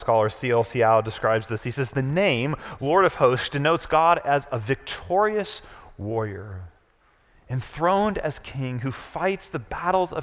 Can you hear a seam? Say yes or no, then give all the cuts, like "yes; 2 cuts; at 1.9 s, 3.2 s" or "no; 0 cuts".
no; 0 cuts